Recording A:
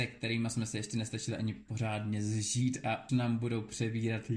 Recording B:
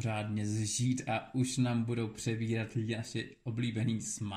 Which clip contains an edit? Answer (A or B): A